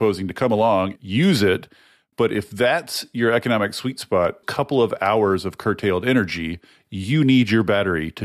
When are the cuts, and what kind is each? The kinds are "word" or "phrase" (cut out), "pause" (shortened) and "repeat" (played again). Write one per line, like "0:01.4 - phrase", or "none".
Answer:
0:01.0 - word
0:04.4 - word